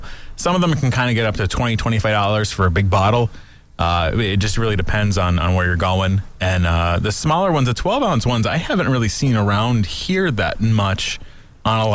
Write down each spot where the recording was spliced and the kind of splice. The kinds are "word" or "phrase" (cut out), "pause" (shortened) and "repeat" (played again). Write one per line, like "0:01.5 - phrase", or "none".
none

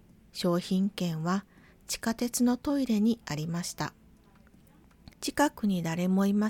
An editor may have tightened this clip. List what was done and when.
0:05.1 - pause

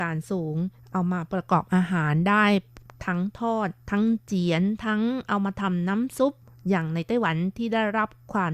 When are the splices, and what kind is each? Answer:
none

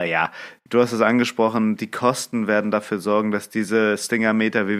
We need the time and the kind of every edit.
none

